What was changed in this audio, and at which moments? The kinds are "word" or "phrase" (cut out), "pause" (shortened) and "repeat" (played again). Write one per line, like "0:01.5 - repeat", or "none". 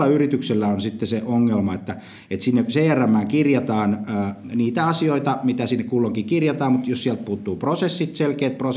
none